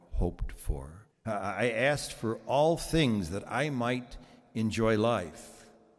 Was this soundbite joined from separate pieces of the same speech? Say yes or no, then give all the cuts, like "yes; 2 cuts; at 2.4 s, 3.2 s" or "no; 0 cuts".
yes; 1 cut; at 1.1 s